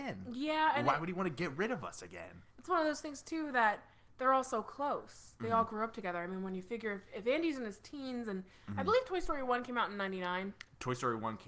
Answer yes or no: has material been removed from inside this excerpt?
no